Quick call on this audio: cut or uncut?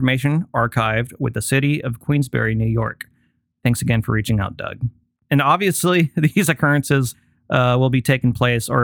uncut